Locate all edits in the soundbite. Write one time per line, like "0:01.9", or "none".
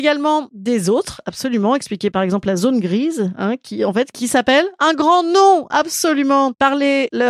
0:04.1